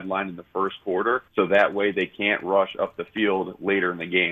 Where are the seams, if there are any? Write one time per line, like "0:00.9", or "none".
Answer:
0:01.3